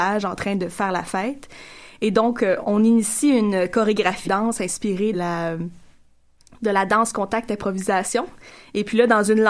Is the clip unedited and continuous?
no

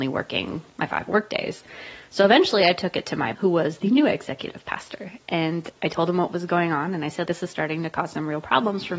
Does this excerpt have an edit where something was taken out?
yes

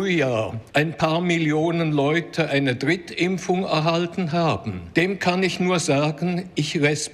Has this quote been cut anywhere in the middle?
no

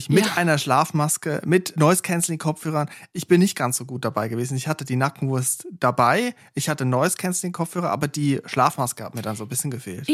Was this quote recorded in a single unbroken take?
yes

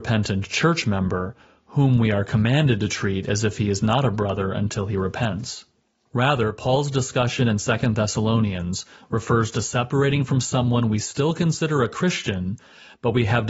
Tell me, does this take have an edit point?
no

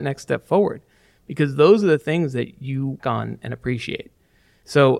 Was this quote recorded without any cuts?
no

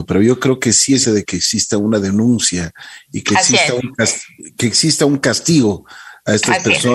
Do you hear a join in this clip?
yes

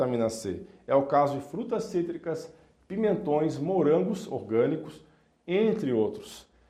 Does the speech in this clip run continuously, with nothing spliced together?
yes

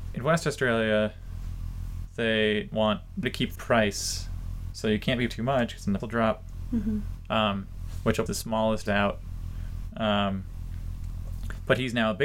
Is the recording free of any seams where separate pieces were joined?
no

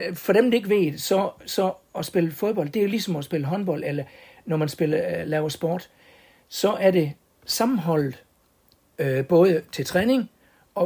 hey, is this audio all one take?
yes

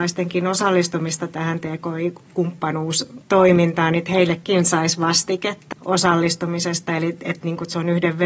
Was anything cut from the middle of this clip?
yes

